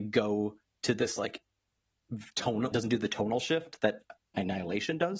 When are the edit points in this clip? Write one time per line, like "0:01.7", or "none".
0:02.7